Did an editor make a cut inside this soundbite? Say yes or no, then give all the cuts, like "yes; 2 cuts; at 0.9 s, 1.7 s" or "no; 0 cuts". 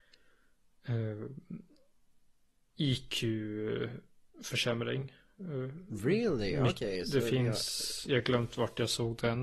no; 0 cuts